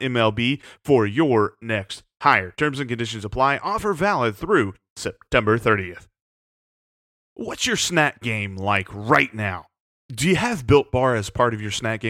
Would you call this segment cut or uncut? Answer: uncut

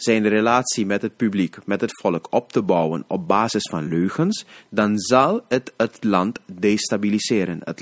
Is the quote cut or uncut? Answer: uncut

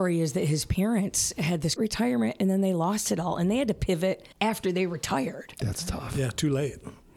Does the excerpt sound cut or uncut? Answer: cut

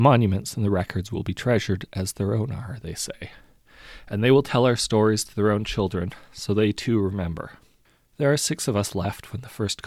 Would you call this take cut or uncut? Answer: cut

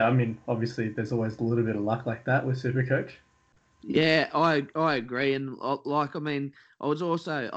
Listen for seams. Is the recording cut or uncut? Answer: uncut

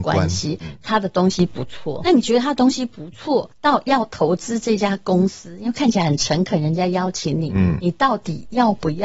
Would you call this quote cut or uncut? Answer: cut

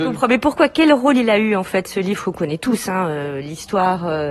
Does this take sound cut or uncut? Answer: uncut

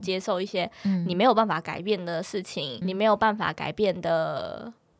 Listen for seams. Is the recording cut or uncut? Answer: cut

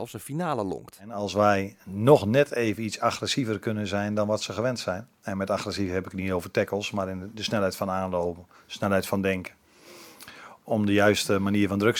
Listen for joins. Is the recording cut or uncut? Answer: uncut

